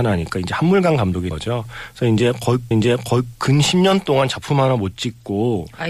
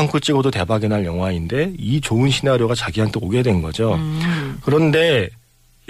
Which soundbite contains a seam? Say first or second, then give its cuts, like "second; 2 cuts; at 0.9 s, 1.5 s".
first; 2 cuts; at 1.3 s, 2.7 s